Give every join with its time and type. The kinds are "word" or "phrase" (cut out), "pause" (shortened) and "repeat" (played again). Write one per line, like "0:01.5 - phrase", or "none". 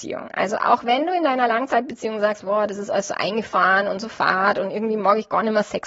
none